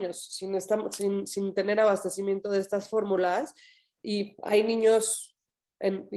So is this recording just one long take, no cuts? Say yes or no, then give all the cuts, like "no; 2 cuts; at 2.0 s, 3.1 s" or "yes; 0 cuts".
yes; 0 cuts